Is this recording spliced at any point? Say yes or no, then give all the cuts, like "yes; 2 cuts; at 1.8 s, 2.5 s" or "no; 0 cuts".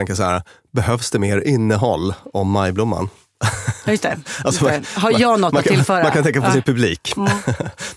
no; 0 cuts